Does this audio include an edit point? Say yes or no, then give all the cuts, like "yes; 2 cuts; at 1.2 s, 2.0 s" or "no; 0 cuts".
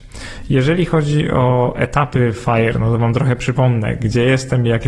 no; 0 cuts